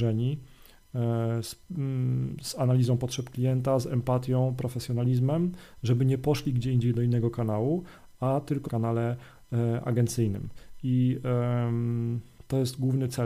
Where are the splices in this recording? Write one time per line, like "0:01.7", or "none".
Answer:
0:08.7